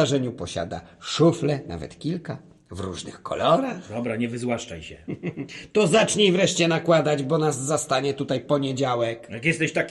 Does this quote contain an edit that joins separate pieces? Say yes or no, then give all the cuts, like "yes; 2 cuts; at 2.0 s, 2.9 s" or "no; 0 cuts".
no; 0 cuts